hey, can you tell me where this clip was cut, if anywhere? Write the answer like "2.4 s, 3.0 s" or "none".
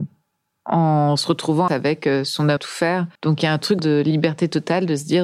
1.7 s, 2.6 s, 3.1 s, 3.8 s